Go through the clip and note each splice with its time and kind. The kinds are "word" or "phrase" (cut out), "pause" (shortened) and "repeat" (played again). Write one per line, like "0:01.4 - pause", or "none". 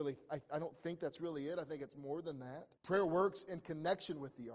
0:02.8 - pause